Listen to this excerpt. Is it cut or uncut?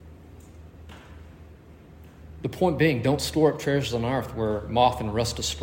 uncut